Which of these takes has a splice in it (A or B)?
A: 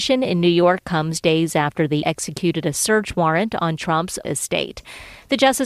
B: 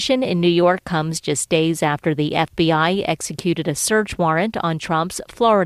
A